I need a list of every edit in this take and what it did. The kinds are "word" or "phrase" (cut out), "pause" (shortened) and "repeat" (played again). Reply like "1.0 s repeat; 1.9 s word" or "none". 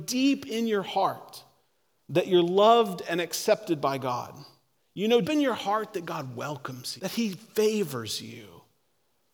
5.2 s word; 7.0 s word